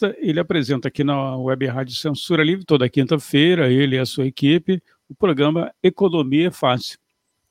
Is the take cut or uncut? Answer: uncut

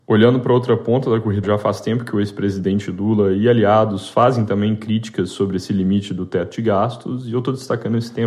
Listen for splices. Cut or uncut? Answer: cut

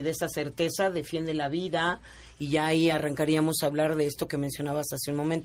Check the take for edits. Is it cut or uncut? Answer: uncut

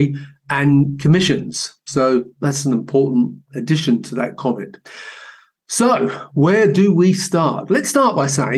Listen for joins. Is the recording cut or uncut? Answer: uncut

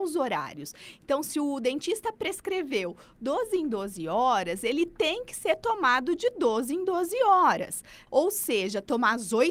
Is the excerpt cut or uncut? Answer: uncut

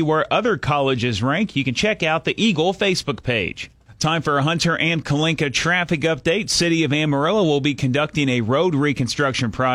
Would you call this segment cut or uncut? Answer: uncut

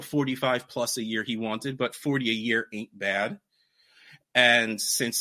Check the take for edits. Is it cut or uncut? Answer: uncut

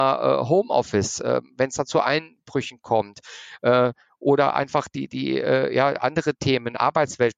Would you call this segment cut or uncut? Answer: uncut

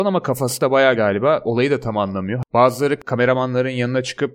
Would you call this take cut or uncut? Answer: cut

